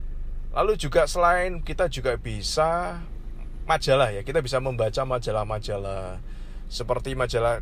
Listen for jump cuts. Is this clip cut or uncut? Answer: cut